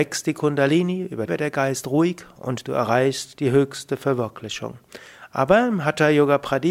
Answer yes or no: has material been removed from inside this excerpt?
yes